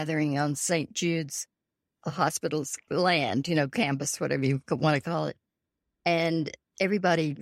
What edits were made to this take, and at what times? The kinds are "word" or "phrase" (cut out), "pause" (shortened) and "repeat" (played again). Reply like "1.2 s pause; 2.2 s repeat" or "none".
none